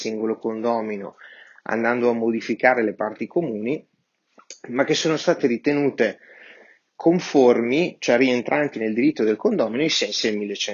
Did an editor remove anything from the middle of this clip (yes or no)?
no